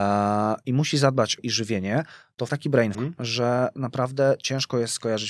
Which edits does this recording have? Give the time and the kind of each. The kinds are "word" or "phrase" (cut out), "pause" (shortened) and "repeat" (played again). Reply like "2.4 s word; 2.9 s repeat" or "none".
1.4 s phrase; 2.5 s phrase; 2.9 s word